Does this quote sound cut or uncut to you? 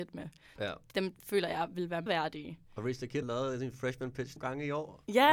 cut